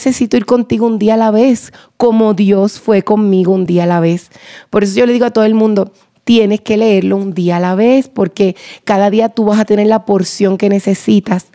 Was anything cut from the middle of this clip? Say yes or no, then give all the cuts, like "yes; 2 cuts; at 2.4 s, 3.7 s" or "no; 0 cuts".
no; 0 cuts